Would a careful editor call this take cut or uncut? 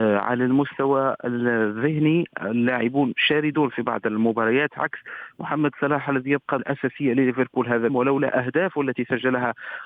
cut